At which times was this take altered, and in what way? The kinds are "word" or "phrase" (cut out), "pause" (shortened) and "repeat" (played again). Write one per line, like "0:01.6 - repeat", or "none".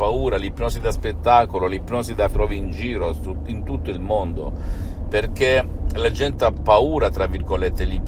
0:02.3 - phrase